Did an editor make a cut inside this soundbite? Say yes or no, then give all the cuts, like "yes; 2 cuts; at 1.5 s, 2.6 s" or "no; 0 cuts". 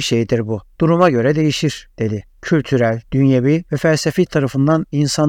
yes; 2 cuts; at 3.0 s, 4.3 s